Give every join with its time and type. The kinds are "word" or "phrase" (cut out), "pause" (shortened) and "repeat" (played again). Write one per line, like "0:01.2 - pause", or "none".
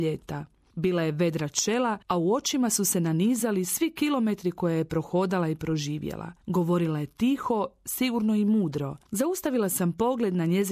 0:02.0 - pause
0:06.4 - pause
0:09.1 - pause